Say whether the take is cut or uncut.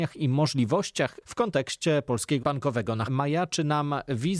cut